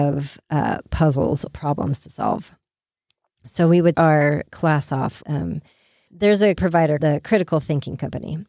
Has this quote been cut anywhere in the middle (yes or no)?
yes